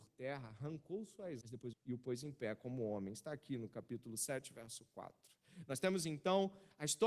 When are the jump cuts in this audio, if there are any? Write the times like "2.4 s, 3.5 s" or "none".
1.4 s, 1.7 s